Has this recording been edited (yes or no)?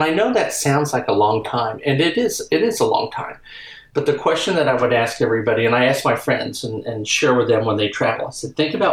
no